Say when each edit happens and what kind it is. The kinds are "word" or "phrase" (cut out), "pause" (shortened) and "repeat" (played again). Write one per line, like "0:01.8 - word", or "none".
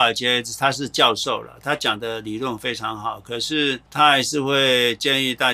0:03.9 - pause